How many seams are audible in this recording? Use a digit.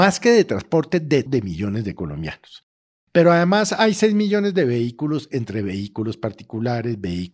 1